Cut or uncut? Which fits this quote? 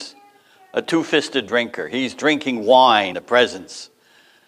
cut